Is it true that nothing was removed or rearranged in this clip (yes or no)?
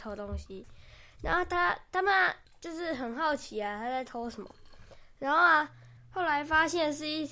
yes